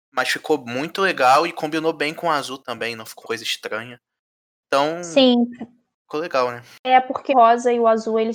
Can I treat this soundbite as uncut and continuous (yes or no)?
no